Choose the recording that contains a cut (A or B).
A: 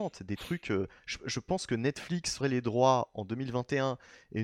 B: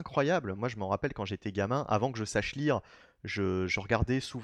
A